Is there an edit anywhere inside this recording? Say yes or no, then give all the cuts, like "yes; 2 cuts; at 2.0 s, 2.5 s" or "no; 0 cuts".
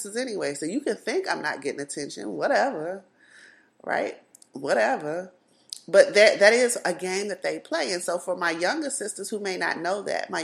no; 0 cuts